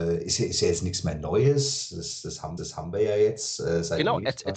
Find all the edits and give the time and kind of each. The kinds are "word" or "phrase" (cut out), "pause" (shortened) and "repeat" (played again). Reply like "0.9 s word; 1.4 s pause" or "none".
2.6 s repeat